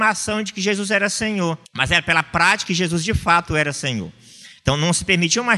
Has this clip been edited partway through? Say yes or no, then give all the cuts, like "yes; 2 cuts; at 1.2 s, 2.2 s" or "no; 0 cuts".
yes; 2 cuts; at 1.6 s, 2.6 s